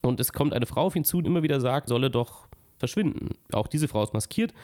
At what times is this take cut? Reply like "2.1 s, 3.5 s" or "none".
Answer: 1.2 s, 1.9 s, 2.8 s